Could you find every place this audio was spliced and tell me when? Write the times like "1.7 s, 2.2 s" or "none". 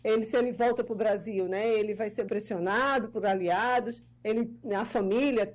2.3 s